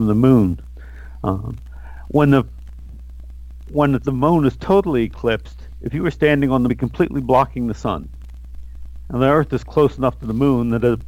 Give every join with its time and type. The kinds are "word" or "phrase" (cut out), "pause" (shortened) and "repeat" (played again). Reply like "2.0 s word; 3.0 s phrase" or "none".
4.0 s word; 6.7 s phrase